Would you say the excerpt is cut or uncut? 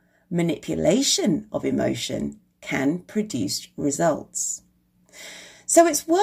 uncut